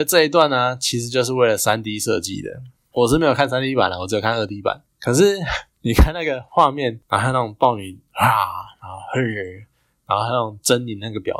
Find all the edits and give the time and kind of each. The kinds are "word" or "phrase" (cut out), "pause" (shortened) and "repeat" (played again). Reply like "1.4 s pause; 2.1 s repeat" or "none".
none